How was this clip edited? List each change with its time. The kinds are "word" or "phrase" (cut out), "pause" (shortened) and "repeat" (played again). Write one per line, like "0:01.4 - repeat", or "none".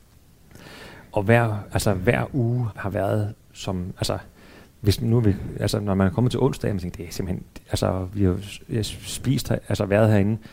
0:02.7 - word